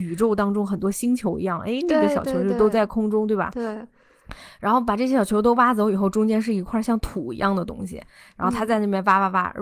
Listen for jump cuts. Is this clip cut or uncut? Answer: uncut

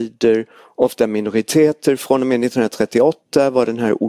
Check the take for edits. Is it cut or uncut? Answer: uncut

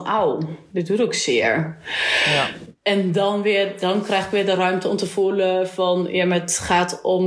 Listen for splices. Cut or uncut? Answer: uncut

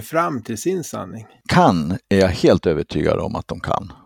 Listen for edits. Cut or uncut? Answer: uncut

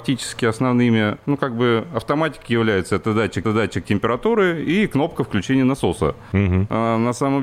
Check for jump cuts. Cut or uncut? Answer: cut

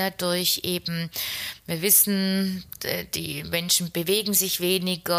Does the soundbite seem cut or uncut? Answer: uncut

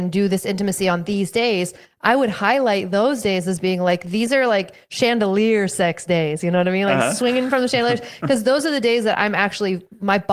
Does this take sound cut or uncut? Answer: uncut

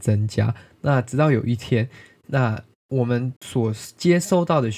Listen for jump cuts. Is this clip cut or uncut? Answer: cut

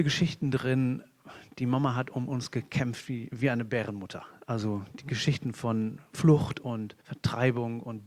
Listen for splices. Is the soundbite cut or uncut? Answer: cut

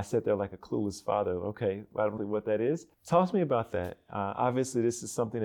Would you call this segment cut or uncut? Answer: cut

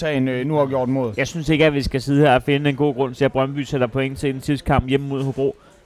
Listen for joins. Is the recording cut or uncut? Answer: uncut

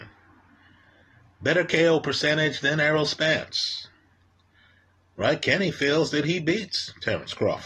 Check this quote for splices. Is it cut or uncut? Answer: uncut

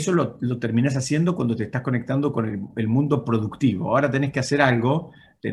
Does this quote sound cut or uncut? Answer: uncut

